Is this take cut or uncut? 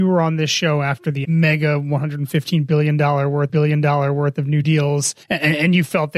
cut